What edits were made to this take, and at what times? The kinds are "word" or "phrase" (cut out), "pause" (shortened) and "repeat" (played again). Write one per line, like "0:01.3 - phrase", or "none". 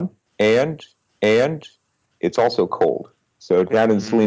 0:01.1 - repeat